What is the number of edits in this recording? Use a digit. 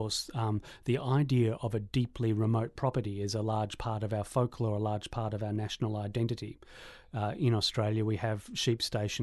0